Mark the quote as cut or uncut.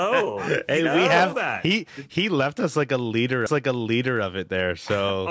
cut